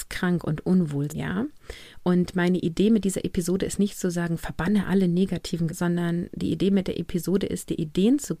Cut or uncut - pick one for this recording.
cut